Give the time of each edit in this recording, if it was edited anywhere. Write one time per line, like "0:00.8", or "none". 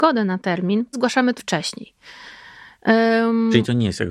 0:00.9
0:01.4